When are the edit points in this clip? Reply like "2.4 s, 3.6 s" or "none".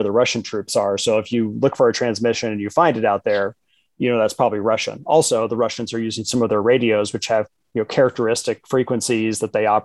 none